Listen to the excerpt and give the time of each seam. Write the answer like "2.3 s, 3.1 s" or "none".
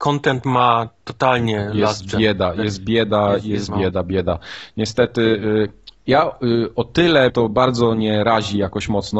3.7 s, 7.3 s